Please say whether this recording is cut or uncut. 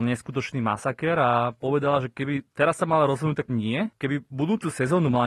cut